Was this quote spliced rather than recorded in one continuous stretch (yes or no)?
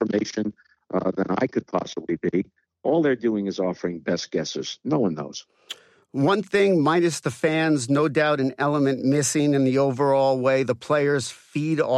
no